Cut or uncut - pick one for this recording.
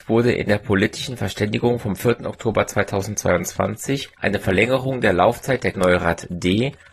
cut